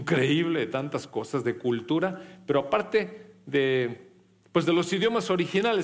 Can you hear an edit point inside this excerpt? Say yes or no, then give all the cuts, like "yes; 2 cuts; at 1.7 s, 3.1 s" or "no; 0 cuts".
no; 0 cuts